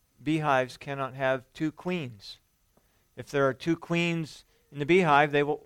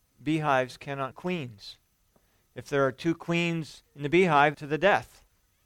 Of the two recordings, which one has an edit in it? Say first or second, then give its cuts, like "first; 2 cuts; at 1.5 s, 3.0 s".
second; 3 cuts; at 1.1 s, 3.9 s, 4.5 s